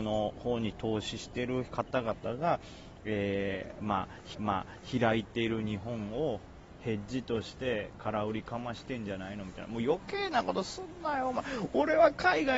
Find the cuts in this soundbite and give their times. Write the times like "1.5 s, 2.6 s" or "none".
4.3 s